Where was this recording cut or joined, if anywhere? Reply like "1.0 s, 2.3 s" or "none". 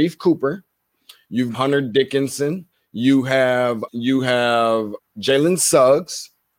1.5 s, 2.7 s, 3.9 s, 5.0 s